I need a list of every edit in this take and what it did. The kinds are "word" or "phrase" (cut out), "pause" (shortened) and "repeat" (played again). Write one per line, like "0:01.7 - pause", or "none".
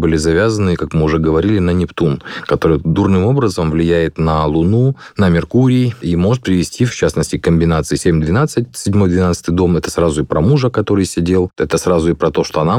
0:03.0 - word